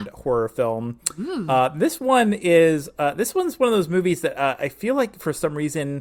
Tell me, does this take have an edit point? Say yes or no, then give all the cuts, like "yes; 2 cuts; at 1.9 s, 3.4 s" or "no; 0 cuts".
no; 0 cuts